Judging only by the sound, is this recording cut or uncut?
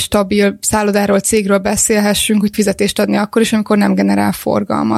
cut